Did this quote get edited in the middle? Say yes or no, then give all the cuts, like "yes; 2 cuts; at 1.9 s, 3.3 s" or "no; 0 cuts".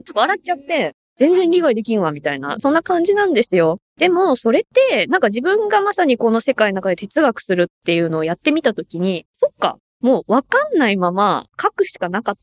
yes; 2 cuts; at 2.6 s, 9.3 s